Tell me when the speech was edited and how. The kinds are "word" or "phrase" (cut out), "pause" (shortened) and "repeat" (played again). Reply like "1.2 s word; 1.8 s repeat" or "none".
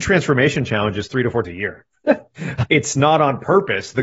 1.4 s word; 2.7 s word